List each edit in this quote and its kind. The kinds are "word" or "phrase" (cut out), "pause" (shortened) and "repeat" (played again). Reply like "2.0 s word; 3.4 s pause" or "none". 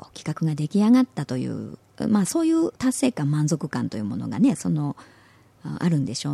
2.8 s pause